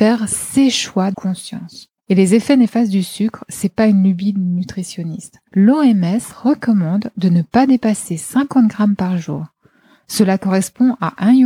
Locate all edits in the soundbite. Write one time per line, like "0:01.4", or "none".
0:01.1
0:02.0
0:05.5